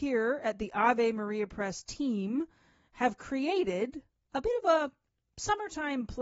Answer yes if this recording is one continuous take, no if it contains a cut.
yes